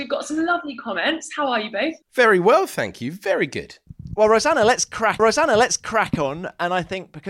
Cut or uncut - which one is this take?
cut